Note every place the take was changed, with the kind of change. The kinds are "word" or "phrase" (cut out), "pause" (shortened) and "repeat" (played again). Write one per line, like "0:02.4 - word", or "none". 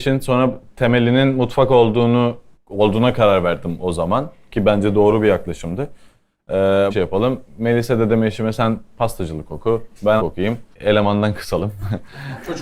0:02.5 - pause
0:06.9 - phrase
0:10.2 - word
0:10.7 - pause